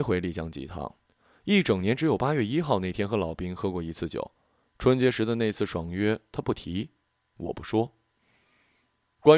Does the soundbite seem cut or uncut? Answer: uncut